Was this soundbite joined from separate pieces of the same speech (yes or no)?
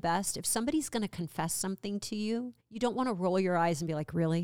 yes